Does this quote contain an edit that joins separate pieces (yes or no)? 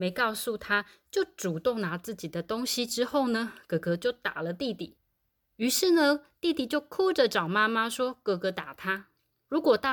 no